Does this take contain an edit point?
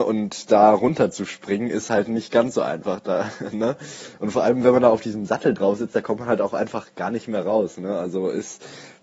no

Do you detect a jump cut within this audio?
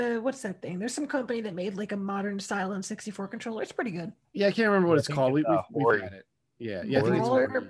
no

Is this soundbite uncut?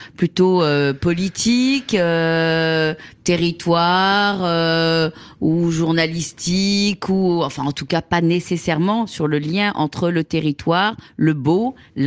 yes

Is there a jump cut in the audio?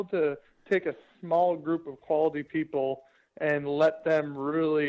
no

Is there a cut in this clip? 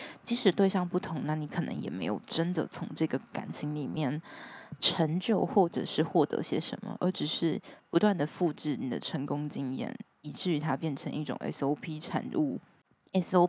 no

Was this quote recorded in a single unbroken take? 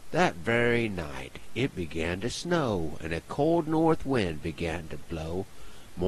yes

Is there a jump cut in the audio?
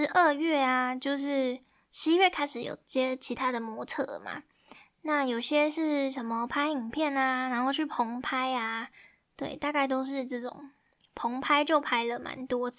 no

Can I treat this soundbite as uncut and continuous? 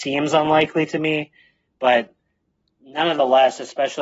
yes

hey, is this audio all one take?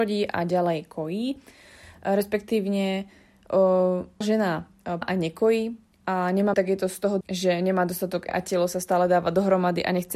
no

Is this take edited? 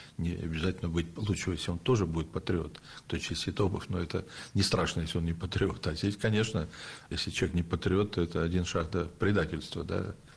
no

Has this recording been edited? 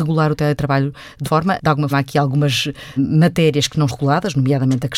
yes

